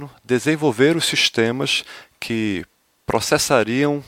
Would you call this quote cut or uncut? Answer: uncut